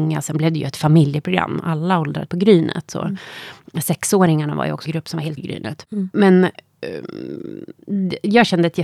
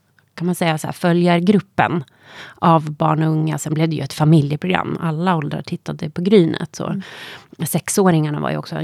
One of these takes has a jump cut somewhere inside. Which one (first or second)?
first